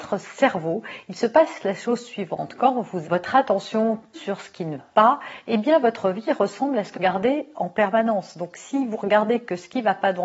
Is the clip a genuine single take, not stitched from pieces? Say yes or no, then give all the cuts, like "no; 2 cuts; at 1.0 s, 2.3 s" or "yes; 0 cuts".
no; 4 cuts; at 3.0 s, 4.1 s, 4.8 s, 6.9 s